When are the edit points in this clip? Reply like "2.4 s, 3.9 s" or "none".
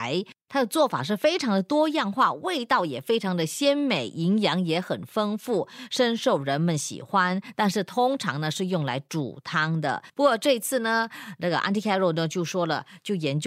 10.1 s